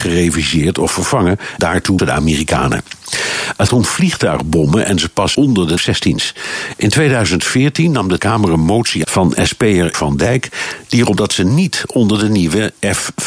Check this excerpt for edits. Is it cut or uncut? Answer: cut